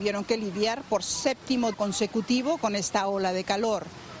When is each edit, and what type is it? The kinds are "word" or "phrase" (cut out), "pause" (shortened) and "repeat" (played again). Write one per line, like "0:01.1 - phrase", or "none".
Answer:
0:01.7 - word

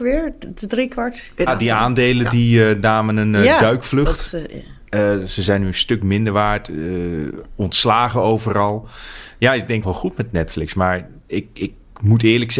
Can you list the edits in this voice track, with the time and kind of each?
0:01.5 - word
0:09.8 - phrase

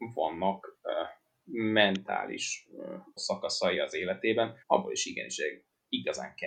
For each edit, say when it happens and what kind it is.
0:03.2 - word
0:04.6 - pause

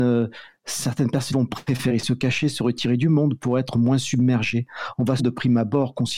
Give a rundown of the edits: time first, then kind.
0:01.3 - word
0:05.2 - word

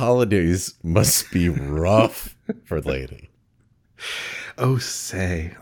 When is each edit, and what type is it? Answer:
0:02.8 - word

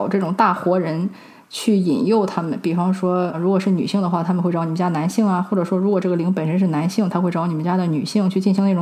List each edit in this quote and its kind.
0:03.3 - word

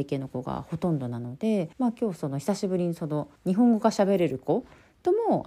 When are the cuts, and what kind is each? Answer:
0:01.7 - pause
0:03.4 - pause

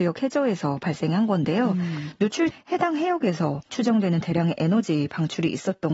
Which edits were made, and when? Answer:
0:02.5 - word
0:03.7 - word

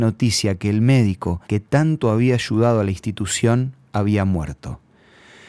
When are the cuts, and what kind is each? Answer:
0:01.4 - pause

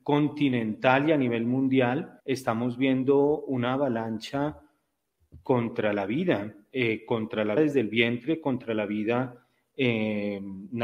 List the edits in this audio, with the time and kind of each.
0:02.2 - pause
0:07.6 - word

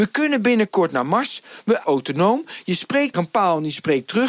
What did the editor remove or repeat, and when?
0:01.8 - phrase
0:03.1 - word

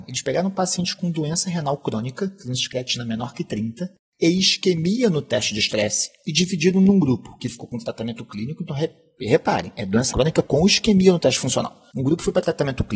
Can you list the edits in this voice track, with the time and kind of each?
0:10.1 - word

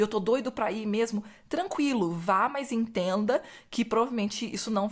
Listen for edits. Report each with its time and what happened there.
none

